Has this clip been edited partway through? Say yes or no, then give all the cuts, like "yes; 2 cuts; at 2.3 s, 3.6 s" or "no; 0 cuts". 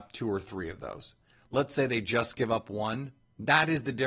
no; 0 cuts